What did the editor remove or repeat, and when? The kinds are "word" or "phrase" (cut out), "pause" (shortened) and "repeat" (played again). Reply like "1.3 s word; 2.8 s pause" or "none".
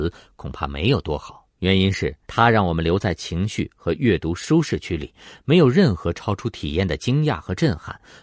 1.5 s pause; 2.2 s pause

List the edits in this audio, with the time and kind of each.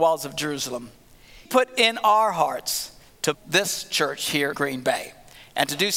1.5 s word; 3.3 s word; 4.5 s word

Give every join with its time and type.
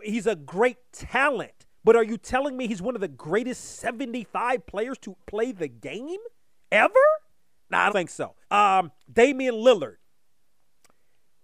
1.7 s pause; 5.2 s word; 7.9 s word; 8.4 s pause

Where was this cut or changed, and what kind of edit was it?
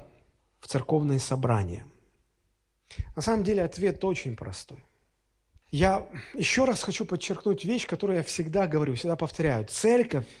none

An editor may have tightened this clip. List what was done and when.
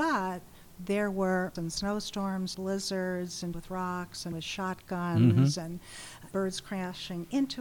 1.6 s word; 2.5 s word; 3.5 s word; 4.3 s word; 6.3 s word

